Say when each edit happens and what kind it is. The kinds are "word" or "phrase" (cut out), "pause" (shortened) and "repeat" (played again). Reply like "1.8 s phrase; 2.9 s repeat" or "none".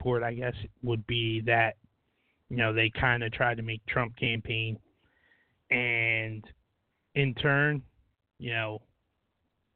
3.8 s phrase